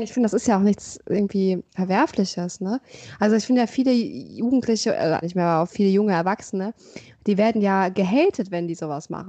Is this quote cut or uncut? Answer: cut